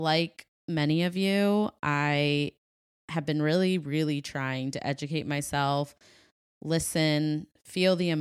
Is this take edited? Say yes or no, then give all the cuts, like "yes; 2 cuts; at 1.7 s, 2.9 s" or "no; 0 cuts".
no; 0 cuts